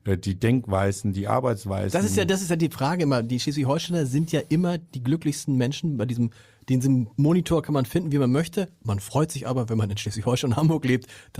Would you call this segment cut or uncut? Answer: uncut